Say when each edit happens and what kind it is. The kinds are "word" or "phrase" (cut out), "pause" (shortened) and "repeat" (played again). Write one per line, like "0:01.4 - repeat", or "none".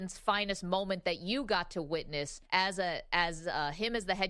0:02.4 - pause